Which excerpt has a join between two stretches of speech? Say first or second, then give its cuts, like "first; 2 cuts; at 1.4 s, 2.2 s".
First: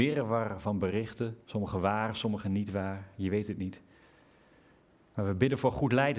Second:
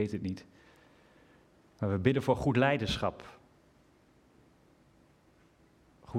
first; 1 cut; at 1.4 s